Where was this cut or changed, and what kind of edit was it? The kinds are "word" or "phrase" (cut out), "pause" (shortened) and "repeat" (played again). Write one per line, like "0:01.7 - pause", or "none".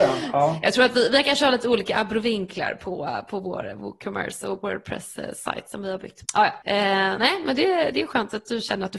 0:06.3 - word